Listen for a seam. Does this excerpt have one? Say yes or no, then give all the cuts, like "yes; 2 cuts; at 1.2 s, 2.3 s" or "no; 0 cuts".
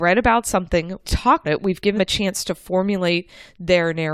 yes; 3 cuts; at 1.0 s, 1.4 s, 2.0 s